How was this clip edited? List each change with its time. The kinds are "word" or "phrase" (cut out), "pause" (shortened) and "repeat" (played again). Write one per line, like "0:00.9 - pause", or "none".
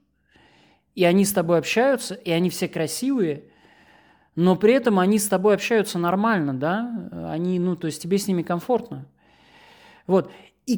none